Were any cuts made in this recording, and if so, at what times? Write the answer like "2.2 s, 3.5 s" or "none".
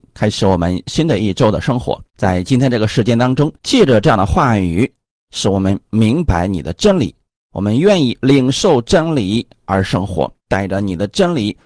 2.1 s, 3.6 s, 10.4 s

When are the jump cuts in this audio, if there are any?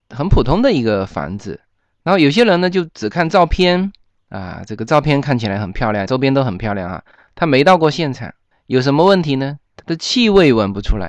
6.1 s

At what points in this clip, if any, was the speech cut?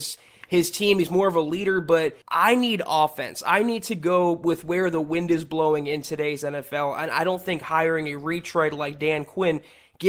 2.2 s

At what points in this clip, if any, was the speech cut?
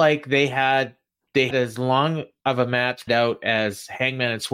1.5 s, 3.1 s

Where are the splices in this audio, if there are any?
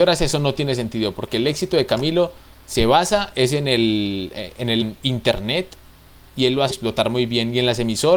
4.8 s, 6.7 s

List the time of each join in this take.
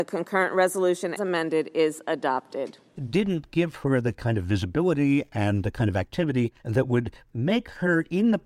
1.2 s, 2.9 s, 6.6 s

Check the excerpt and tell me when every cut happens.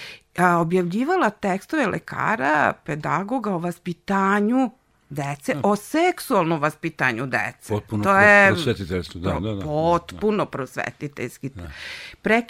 none

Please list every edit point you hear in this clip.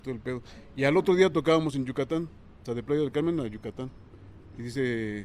none

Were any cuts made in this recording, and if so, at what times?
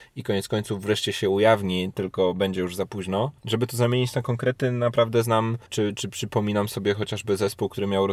3.4 s, 5.7 s

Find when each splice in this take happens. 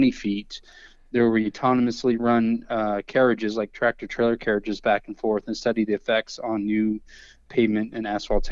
none

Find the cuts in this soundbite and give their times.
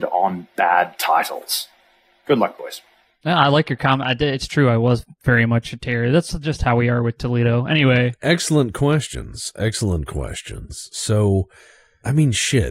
none

